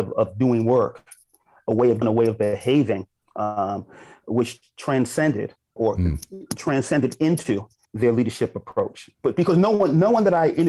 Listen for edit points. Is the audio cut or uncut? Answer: cut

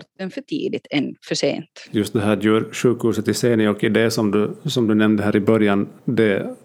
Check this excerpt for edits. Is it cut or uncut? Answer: uncut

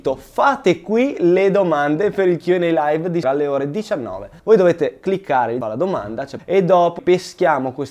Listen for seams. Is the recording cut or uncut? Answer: cut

